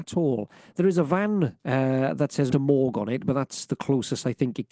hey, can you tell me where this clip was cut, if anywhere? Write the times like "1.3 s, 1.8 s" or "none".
1.6 s, 2.5 s